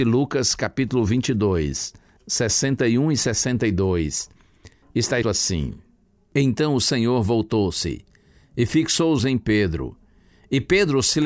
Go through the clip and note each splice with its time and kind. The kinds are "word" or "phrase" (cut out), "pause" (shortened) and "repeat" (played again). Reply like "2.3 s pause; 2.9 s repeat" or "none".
2.2 s word; 5.2 s word; 9.2 s word